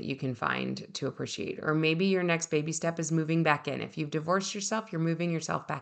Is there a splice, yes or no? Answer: no